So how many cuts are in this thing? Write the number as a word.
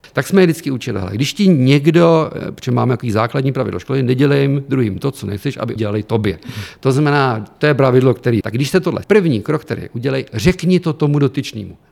three